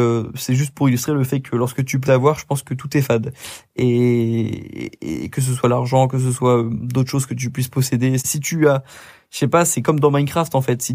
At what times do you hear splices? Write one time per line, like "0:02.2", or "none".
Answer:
0:02.0
0:08.2